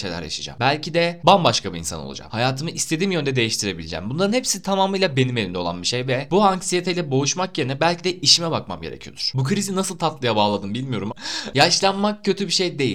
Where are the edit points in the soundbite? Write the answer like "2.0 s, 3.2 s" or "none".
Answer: 11.1 s